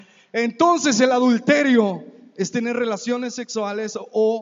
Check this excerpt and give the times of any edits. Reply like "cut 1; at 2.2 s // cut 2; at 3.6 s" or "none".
none